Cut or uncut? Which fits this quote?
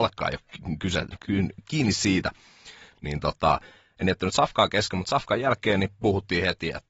uncut